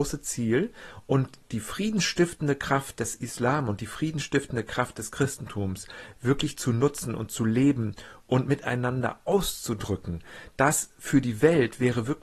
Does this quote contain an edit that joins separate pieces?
no; 0 cuts

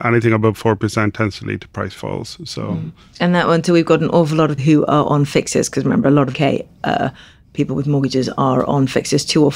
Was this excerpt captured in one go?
no; 2 cuts; at 4.6 s, 6.3 s

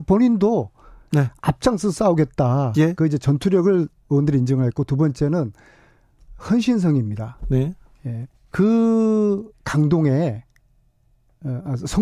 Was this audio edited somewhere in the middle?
yes; 4 cuts; at 1.1 s, 4.0 s, 6.4 s, 8.3 s

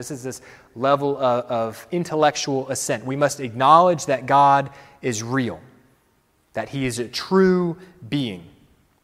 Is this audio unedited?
yes; 0 cuts

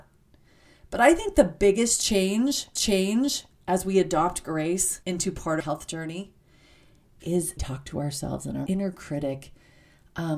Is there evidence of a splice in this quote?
yes; 5 cuts; at 2.8 s, 5.0 s, 5.6 s, 7.6 s, 8.7 s

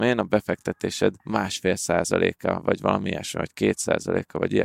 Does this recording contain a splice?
yes; 1 cut; at 1.2 s

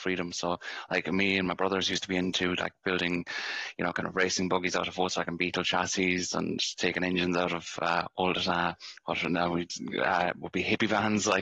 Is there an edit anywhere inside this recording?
no; 0 cuts

